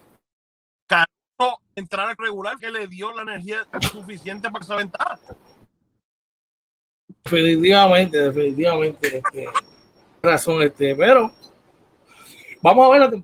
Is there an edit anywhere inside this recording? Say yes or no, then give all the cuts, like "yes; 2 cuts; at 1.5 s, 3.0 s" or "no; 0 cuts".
yes; 5 cuts; at 1.8 s, 2.2 s, 2.6 s, 4.6 s, 10.2 s